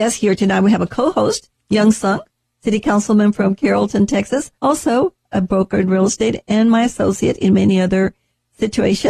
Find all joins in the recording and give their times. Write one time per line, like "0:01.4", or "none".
0:04.6